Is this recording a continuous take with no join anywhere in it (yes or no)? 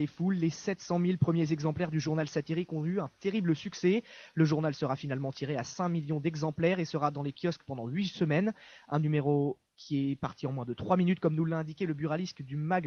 no